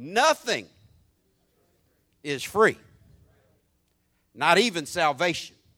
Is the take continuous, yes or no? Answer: yes